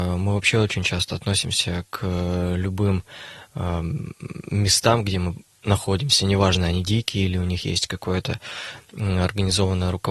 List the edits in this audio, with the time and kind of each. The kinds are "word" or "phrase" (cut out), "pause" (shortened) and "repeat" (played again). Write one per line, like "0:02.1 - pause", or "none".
none